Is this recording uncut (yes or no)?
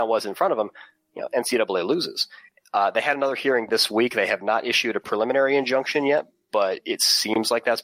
yes